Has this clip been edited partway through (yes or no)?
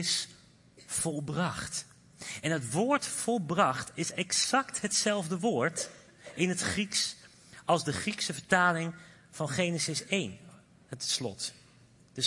no